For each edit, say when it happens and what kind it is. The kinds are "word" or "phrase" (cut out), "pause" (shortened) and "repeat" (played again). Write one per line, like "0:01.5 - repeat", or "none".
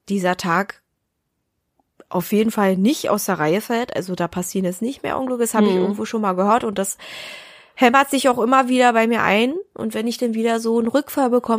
none